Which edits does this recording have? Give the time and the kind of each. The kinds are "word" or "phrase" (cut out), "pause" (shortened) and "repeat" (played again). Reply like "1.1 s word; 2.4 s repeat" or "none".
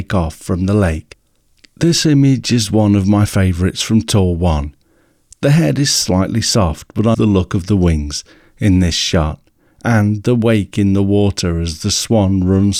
7.1 s word